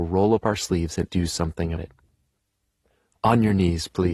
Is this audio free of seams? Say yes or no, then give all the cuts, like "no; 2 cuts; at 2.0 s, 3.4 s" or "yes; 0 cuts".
no; 2 cuts; at 1.1 s, 1.8 s